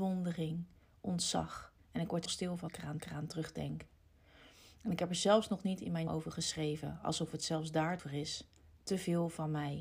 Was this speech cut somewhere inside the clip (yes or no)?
yes